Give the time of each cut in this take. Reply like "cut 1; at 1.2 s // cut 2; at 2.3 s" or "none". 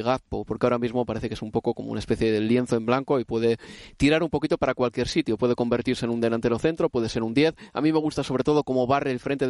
none